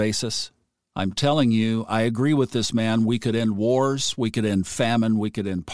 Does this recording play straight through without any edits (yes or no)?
yes